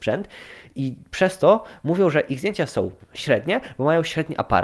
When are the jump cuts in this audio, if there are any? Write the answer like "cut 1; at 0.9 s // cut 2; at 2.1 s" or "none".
none